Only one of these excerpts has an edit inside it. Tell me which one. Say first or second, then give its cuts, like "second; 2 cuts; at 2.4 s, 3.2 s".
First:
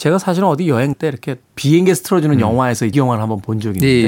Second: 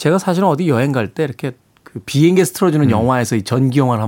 first; 3 cuts; at 0.9 s, 1.5 s, 2.9 s